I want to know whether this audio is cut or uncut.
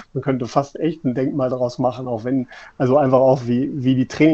uncut